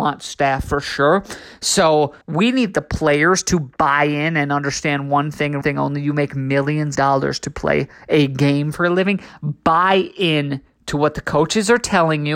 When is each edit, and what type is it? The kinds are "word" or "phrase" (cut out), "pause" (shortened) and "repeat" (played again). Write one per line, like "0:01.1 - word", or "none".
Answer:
0:02.2 - pause
0:05.6 - word
0:07.0 - word